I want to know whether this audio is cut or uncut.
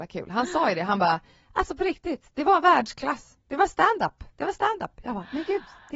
uncut